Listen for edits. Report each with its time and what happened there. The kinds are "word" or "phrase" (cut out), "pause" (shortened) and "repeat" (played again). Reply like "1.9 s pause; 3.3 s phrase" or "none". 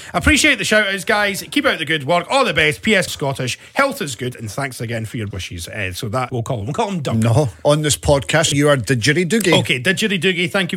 3.1 s phrase; 5.3 s word; 6.3 s phrase; 8.5 s phrase

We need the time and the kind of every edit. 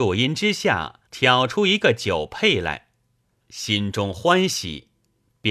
1.1 s pause; 3.4 s phrase

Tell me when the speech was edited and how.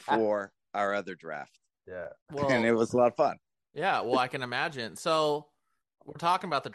2.2 s pause

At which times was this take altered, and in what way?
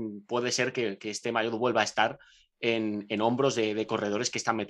none

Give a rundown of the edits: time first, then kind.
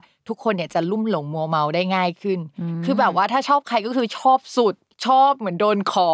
4.9 s pause

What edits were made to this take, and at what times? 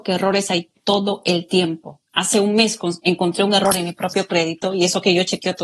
none

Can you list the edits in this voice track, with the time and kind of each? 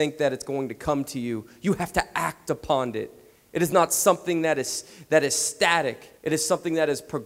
6.2 s pause

